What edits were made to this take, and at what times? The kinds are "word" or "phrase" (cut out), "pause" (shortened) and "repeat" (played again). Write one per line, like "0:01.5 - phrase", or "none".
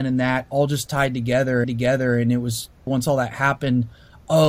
0:01.6 - repeat
0:02.9 - word